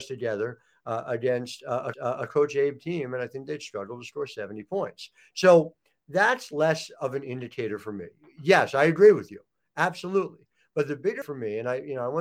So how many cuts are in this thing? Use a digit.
2